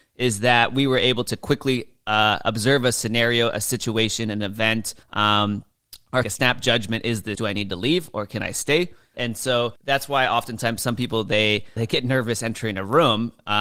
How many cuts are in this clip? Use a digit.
6